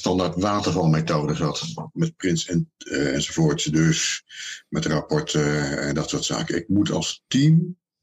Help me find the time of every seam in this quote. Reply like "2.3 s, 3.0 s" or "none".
none